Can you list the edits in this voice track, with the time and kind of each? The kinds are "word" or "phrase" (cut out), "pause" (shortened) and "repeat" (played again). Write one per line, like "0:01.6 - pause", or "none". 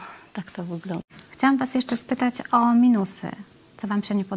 none

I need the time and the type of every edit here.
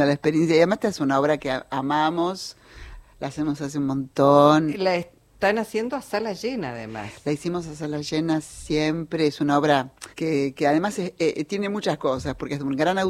0:10.1 - pause

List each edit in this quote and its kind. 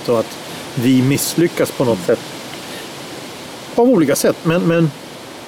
none

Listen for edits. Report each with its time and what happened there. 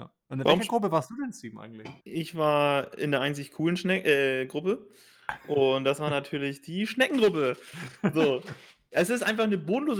0:02.0 - pause

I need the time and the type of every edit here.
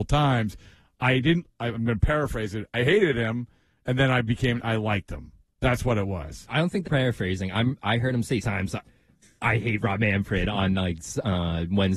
0:06.8 - word
0:08.4 - word

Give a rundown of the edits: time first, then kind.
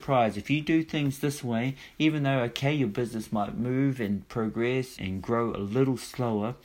0:05.0 - word

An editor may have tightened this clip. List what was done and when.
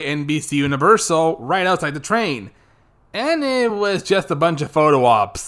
none

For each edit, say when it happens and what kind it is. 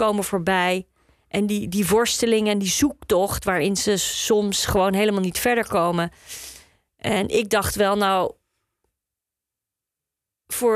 none

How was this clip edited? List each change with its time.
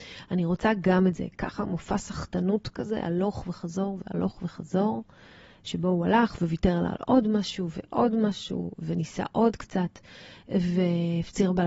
none

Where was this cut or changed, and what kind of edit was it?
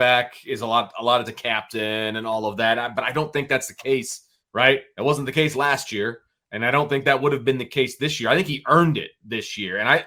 0:01.3 - word
0:04.4 - word

